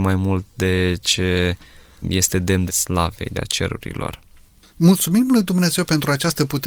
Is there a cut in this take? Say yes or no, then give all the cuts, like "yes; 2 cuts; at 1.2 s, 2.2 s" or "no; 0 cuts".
yes; 4 cuts; at 1.0 s, 2.0 s, 2.7 s, 3.3 s